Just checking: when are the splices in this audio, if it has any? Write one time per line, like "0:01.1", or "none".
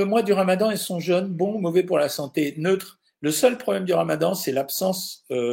none